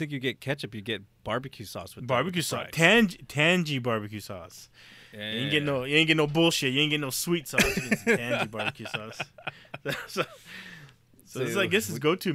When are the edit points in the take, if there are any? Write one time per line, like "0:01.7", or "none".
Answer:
none